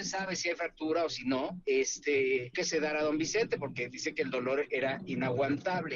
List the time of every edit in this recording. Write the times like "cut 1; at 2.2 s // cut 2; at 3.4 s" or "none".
cut 1; at 2.5 s